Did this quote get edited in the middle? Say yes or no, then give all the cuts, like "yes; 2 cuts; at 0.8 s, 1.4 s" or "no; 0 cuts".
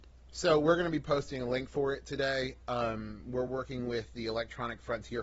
no; 0 cuts